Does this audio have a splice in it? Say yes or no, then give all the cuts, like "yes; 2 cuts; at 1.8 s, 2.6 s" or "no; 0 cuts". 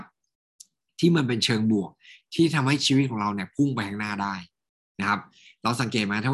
no; 0 cuts